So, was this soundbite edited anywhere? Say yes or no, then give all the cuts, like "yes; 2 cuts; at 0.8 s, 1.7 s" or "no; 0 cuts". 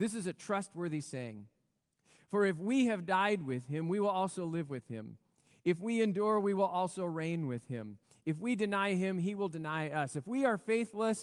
no; 0 cuts